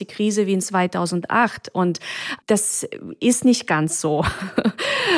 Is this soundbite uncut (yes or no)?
yes